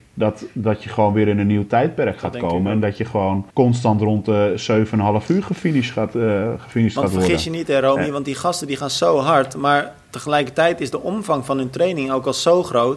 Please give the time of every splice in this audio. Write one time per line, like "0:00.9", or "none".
0:03.5